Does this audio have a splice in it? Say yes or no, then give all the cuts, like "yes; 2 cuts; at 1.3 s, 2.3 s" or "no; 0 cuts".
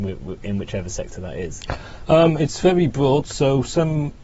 no; 0 cuts